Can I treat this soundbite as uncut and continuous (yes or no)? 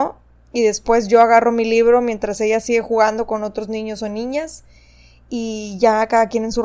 yes